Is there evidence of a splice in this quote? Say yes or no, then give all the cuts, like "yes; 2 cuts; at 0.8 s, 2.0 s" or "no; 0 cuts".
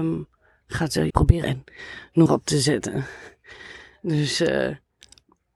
yes; 3 cuts; at 1.1 s, 1.4 s, 2.3 s